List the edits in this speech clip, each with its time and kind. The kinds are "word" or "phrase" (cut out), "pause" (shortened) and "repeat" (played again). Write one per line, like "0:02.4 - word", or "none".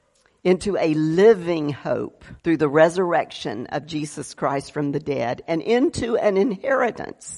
0:02.4 - pause